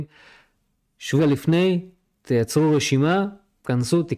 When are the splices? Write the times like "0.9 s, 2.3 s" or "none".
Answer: 1.2 s